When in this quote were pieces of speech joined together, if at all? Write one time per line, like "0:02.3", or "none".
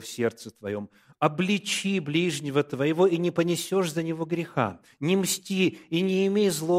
none